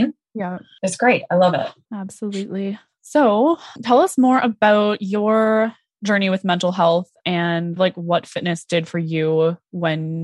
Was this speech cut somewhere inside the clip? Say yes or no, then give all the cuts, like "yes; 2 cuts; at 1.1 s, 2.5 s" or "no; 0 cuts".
yes; 1 cut; at 7.8 s